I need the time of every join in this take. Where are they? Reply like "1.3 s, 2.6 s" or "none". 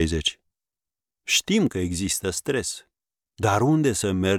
none